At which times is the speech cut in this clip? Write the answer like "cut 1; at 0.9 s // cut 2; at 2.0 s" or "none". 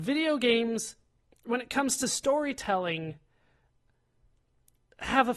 none